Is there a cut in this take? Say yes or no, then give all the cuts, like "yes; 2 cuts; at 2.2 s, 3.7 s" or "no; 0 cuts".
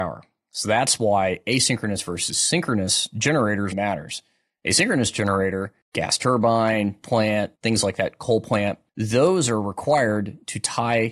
yes; 5 cuts; at 3.7 s, 5.8 s, 7.0 s, 7.6 s, 8.9 s